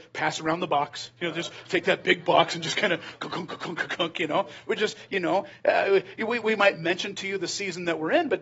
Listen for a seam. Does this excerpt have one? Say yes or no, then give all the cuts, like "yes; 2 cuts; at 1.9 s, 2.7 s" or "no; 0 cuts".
no; 0 cuts